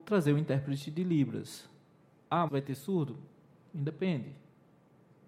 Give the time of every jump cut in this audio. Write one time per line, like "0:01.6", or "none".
0:02.5